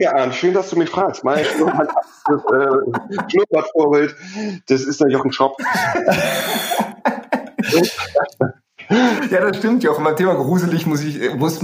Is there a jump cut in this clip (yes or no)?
yes